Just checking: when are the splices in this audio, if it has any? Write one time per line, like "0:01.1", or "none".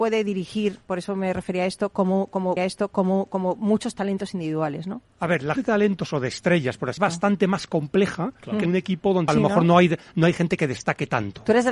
0:02.6
0:05.1
0:05.6
0:07.0
0:08.7
0:09.3